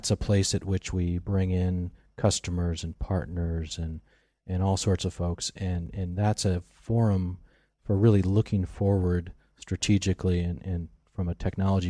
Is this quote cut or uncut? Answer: uncut